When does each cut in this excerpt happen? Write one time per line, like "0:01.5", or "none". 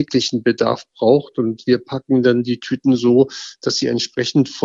none